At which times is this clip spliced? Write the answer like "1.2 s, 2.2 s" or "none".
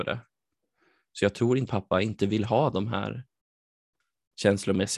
1.7 s